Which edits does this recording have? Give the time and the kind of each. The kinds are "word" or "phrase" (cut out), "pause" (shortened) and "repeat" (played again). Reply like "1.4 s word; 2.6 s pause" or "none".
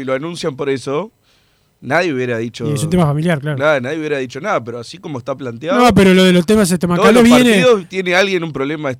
none

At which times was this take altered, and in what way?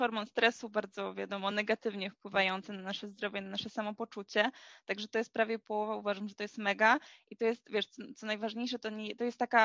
none

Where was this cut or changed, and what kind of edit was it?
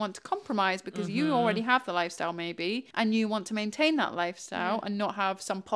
2.9 s pause

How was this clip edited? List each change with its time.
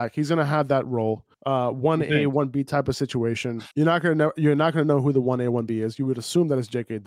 1.3 s pause; 3.7 s pause

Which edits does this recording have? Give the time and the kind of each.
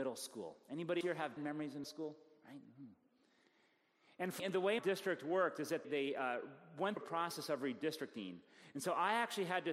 1.0 s word; 1.4 s word; 1.8 s word; 4.4 s word; 4.8 s word; 5.8 s word; 7.0 s word

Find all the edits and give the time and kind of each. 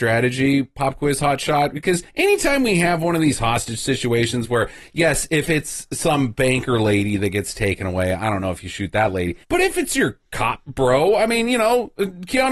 2.1 s pause; 9.4 s pause; 10.3 s pause

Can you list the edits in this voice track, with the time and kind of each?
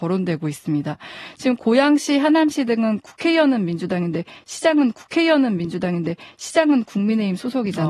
4.9 s repeat

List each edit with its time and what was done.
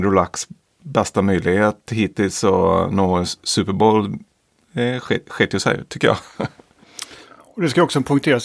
none

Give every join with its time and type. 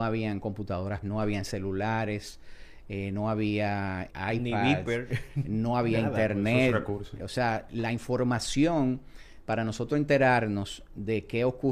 1.0 s word; 4.1 s word; 7.2 s word

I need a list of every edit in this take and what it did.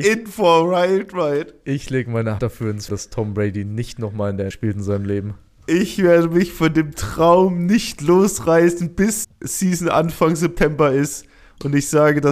2.4 s word; 2.9 s word; 4.5 s word; 9.2 s word

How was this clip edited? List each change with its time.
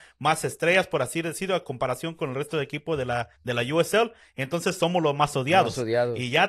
3.3 s pause

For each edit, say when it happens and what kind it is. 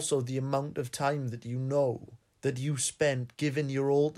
2.2 s pause

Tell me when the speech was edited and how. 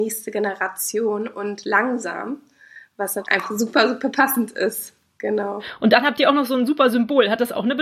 none

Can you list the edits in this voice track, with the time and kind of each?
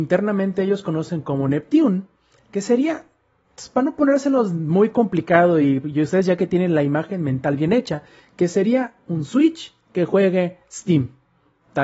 none

